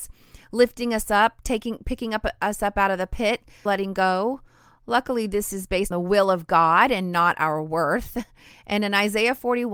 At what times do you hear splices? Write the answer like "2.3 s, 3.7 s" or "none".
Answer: 3.7 s, 5.9 s